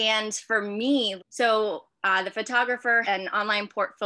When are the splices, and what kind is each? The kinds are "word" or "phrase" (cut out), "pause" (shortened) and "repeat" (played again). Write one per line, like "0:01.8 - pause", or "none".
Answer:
0:01.2 - word
0:03.0 - word